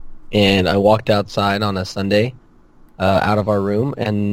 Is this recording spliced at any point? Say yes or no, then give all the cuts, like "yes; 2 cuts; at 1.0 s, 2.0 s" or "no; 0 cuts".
no; 0 cuts